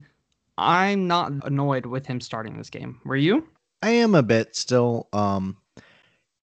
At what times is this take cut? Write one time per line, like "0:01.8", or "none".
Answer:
0:01.4
0:03.6